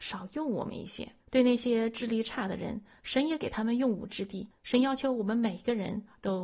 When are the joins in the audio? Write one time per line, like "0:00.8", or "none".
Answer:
0:01.2
0:04.5